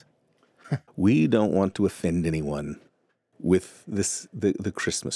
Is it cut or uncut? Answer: uncut